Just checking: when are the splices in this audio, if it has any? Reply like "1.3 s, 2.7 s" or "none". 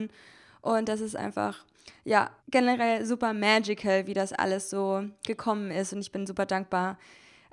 2.4 s

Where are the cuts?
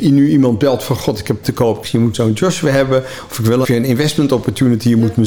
1.4 s, 1.8 s, 2.1 s, 3.6 s

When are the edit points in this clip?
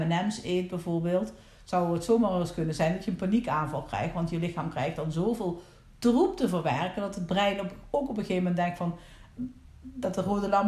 none

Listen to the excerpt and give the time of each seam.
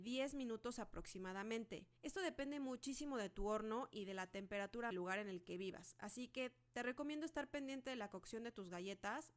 2.0 s, 4.9 s

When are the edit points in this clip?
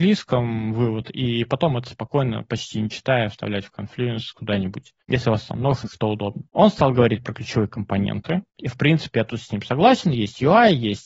5.0 s, 5.8 s, 6.5 s, 8.5 s

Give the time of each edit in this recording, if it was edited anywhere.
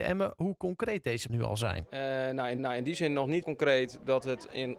1.3 s, 2.6 s, 3.4 s

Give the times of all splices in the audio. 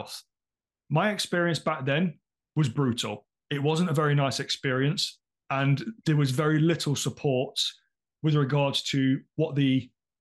none

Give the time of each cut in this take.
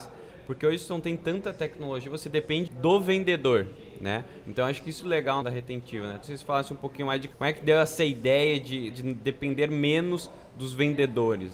2.7 s, 5.0 s, 5.4 s, 6.2 s, 7.3 s, 8.9 s

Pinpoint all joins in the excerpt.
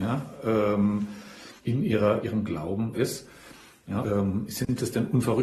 1.6 s, 2.2 s, 2.9 s, 4.0 s

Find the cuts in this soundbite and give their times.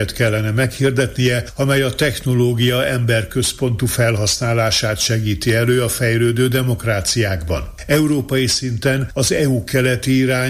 none

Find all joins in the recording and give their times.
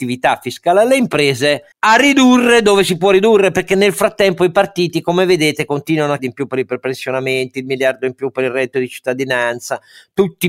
1.7 s, 6.2 s

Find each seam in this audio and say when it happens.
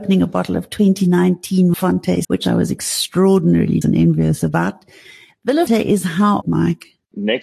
1.7 s, 2.2 s, 3.8 s, 5.7 s, 6.4 s

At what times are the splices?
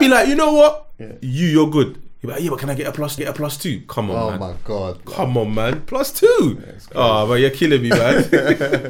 3.2 s

